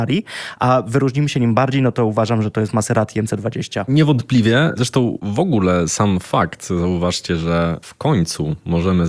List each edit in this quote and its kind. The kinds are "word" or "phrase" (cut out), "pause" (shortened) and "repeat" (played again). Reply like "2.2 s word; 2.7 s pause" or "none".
none